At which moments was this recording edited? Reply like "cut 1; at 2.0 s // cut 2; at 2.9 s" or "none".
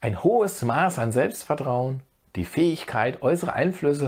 cut 1; at 2.2 s